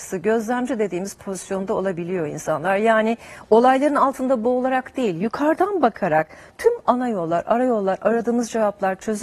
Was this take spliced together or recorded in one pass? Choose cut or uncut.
uncut